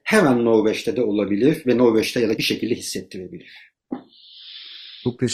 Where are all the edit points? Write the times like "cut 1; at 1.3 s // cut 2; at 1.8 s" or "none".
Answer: cut 1; at 2.4 s

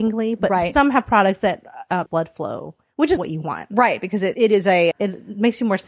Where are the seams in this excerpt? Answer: cut 1; at 2.1 s // cut 2; at 3.2 s // cut 3; at 4.3 s // cut 4; at 4.9 s

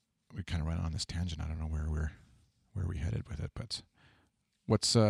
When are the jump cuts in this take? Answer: none

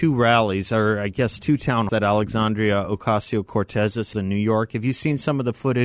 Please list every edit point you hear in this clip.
cut 1; at 1.9 s // cut 2; at 4.1 s

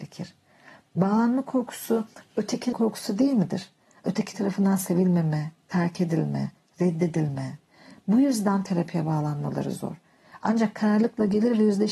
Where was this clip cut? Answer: cut 1; at 2.7 s

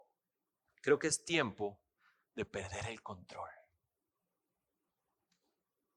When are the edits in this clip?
none

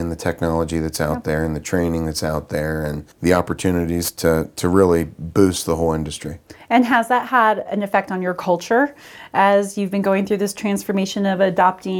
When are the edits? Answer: cut 1; at 3.1 s // cut 2; at 7.7 s

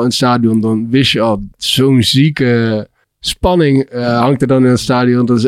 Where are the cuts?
cut 1; at 1.5 s // cut 2; at 3.0 s

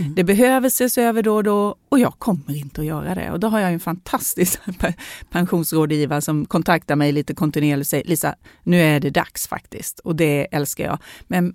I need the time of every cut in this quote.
none

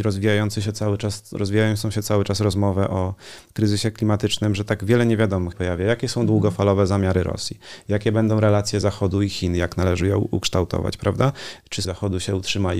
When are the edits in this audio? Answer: cut 1; at 5.5 s // cut 2; at 11.8 s

